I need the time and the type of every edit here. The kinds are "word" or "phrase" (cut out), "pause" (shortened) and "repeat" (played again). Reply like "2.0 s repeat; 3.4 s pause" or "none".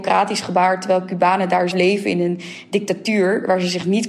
1.7 s word